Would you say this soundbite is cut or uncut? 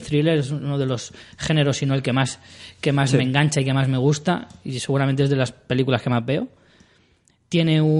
uncut